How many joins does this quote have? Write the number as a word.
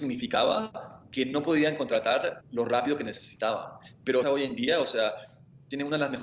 two